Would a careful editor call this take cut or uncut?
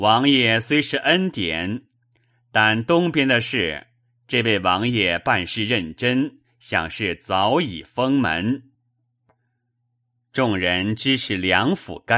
uncut